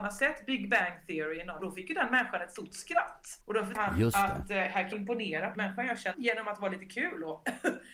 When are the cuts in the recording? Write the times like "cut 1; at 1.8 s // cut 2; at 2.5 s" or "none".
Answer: cut 1; at 1.6 s // cut 2; at 3.4 s // cut 3; at 3.7 s // cut 4; at 4.9 s // cut 5; at 5.5 s // cut 6; at 6.1 s